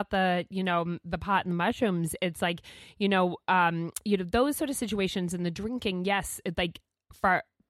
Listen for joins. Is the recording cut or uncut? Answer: uncut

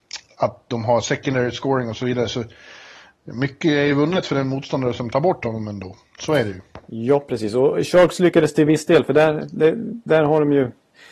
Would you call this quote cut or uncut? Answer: uncut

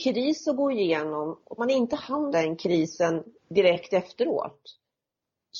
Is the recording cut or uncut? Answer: cut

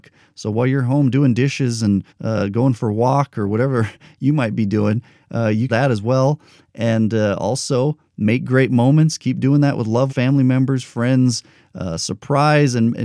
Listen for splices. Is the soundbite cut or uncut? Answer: cut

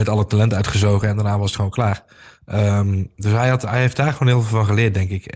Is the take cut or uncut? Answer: uncut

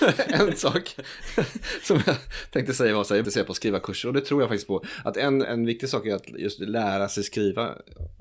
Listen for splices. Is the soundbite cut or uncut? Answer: cut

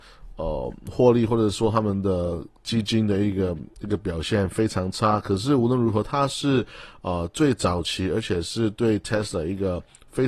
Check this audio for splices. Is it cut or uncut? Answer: uncut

